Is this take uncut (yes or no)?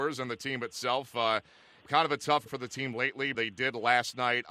no